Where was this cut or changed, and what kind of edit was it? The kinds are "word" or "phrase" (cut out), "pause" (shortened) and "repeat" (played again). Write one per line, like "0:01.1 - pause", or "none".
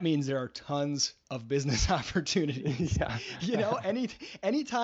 0:01.2 - pause